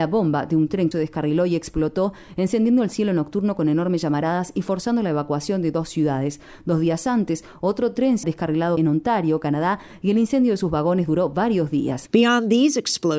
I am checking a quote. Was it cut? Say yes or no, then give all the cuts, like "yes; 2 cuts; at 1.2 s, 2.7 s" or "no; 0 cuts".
yes; 2 cuts; at 0.9 s, 8.2 s